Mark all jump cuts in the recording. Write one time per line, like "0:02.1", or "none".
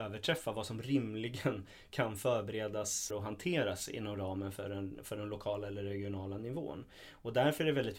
0:03.1